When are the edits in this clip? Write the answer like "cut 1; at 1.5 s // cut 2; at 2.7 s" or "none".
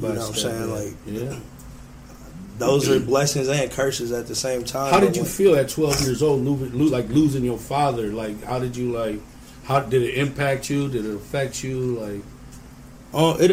none